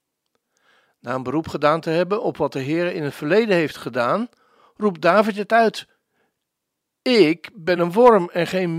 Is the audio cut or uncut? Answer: uncut